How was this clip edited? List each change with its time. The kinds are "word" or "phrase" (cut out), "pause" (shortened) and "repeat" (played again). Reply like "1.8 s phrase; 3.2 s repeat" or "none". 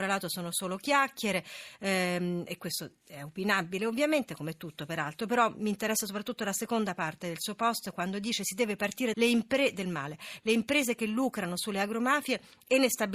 9.1 s phrase